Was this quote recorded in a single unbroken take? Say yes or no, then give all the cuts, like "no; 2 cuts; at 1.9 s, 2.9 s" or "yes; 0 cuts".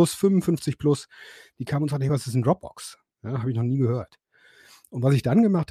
yes; 0 cuts